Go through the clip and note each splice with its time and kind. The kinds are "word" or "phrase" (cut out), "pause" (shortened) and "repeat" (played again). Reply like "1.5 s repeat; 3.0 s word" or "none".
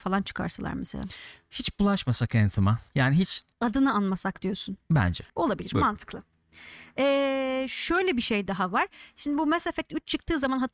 2.9 s pause; 3.5 s pause; 5.3 s pause

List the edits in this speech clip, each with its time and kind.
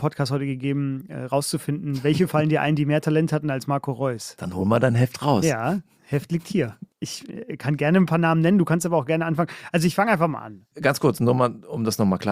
6.9 s pause

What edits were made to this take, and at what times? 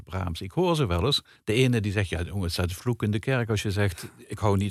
1.4 s pause

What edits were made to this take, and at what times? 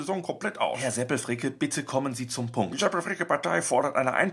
none

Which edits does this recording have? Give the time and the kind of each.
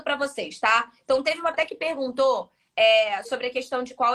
1.5 s word; 3.2 s word

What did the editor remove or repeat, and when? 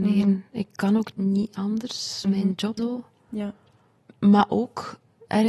1.1 s word; 2.2 s word; 2.8 s word

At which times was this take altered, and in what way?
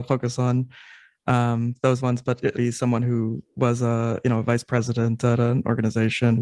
2.5 s phrase

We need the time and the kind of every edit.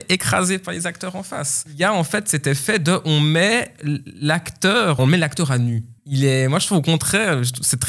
5.0 s phrase; 6.0 s pause

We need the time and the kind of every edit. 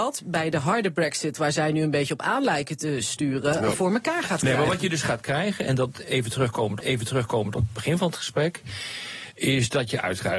6.8 s repeat

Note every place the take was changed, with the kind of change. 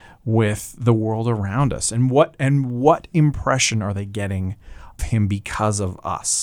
5.0 s word

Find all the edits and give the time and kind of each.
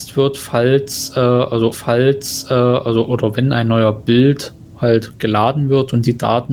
1.7 s repeat

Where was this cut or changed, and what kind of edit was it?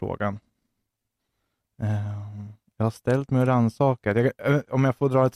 2.6 s pause

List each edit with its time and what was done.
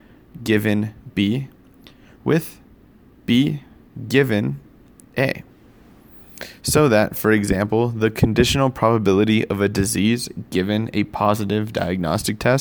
none

